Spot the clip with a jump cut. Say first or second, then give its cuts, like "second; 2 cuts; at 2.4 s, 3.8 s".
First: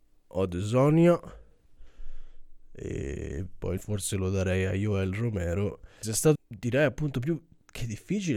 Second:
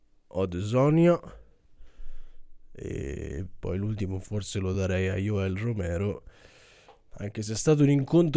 first; 3 cuts; at 3.8 s, 6.0 s, 6.3 s